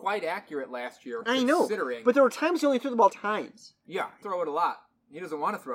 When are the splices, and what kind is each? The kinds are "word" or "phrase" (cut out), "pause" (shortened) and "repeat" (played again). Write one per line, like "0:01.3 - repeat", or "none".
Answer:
0:03.1 - word
0:04.2 - word